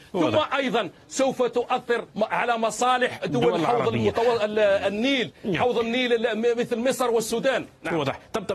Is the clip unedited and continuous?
no; 2 cuts; at 2.1 s, 3.2 s

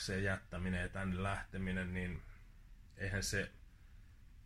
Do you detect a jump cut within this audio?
no; 0 cuts

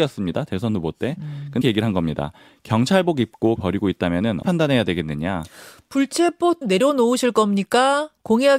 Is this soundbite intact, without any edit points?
no; 4 cuts; at 1.6 s, 3.6 s, 4.4 s, 6.6 s

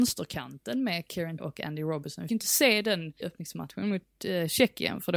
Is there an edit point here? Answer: yes; 3 cuts; at 1.4 s, 2.3 s, 3.2 s

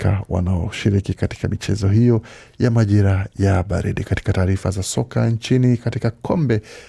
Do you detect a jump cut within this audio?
no; 0 cuts

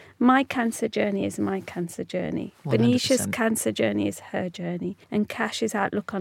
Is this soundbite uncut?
no; 1 cut; at 5.0 s

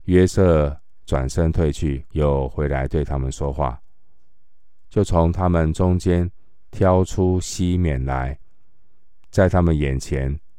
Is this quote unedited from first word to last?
no; 1 cut; at 2.1 s

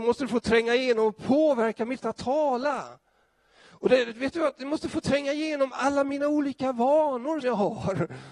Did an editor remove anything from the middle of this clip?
yes; 2 cuts; at 2.0 s, 7.4 s

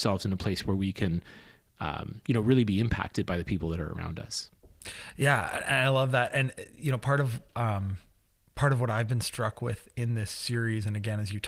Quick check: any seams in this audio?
no; 0 cuts

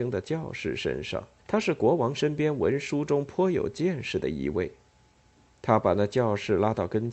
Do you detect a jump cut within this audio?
yes; 1 cut; at 1.4 s

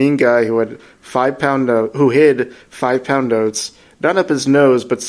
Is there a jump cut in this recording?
no; 0 cuts

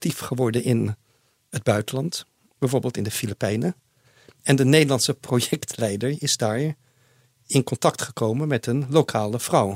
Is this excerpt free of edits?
yes; 0 cuts

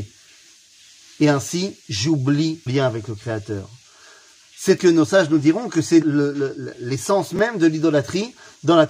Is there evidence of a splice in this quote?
yes; 3 cuts; at 2.7 s, 4.8 s, 6.0 s

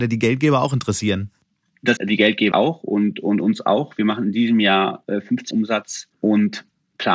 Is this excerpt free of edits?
no; 4 cuts; at 2.0 s, 2.5 s, 5.5 s, 6.1 s

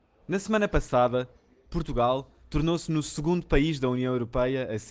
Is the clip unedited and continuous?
yes; 0 cuts

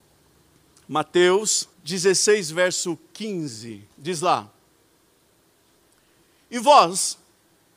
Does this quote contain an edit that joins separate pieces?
yes; 2 cuts; at 1.7 s, 3.9 s

